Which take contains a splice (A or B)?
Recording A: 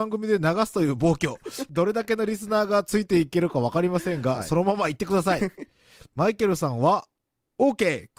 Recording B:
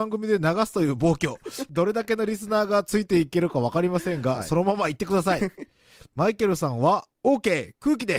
B